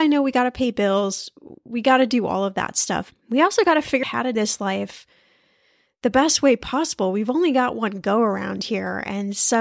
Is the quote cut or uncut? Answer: cut